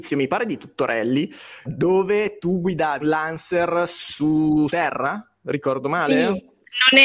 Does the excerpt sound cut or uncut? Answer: cut